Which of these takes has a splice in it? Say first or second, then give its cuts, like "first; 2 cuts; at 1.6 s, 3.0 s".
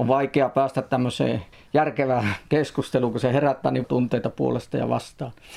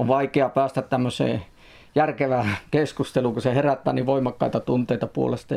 first; 2 cuts; at 1.5 s, 3.8 s